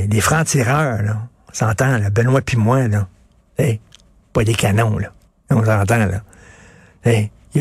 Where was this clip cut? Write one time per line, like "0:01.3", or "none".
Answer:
0:05.3

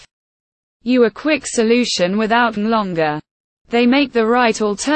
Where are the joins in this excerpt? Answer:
0:02.6

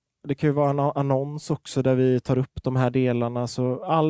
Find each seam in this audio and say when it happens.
none

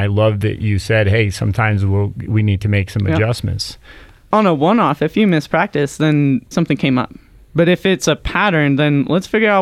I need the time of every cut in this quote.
0:06.5

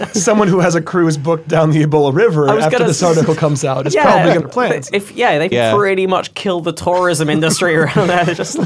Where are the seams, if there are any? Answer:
0:04.4
0:05.5

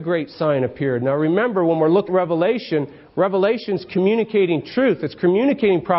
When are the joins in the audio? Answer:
0:02.1

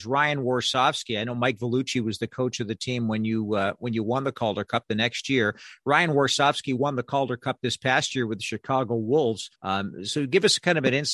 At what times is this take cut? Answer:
0:09.5

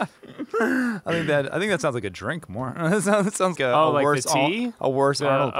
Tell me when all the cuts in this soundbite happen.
0:03.6

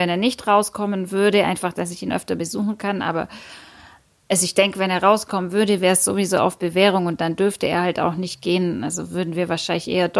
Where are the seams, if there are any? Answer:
none

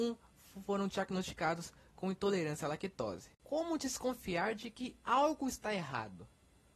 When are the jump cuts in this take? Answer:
0:03.3

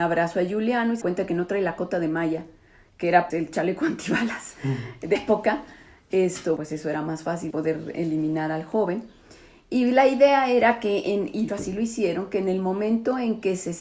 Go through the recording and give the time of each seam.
0:01.0
0:03.3
0:05.1
0:06.6
0:07.5
0:11.5

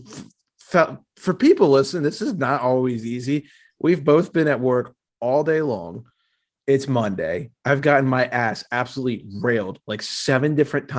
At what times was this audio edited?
none

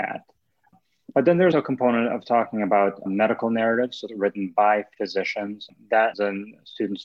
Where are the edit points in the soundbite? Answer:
0:01.5
0:03.1
0:04.1
0:06.1

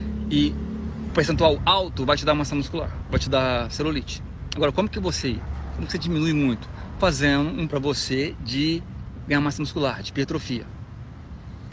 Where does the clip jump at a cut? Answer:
0:01.1
0:05.2
0:07.7

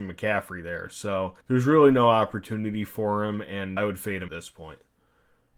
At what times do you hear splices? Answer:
0:01.4
0:03.8
0:04.3

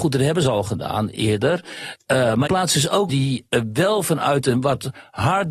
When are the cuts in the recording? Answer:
0:02.5
0:03.1

